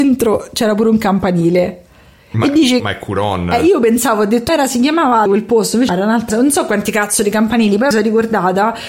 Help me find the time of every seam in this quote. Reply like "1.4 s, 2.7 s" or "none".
2.8 s, 4.5 s, 5.3 s, 5.9 s, 6.3 s, 7.9 s

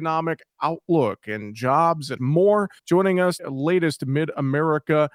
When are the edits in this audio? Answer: 2.2 s, 2.8 s, 3.4 s

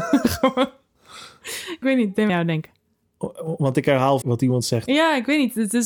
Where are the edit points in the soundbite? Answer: 1.8 s, 2.3 s, 4.2 s

